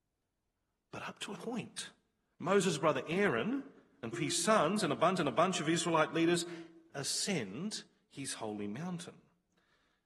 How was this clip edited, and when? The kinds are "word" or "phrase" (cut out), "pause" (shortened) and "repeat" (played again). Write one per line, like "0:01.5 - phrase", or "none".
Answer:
0:01.4 - word
0:04.1 - word
0:05.2 - repeat
0:06.9 - word